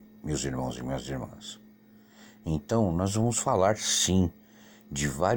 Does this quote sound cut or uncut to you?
uncut